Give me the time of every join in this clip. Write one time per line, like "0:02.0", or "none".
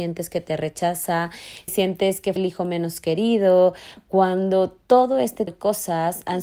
0:01.7
0:02.4
0:05.5